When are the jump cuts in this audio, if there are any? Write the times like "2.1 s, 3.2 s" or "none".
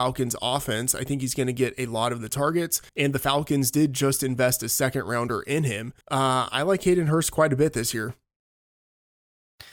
2.9 s, 6.0 s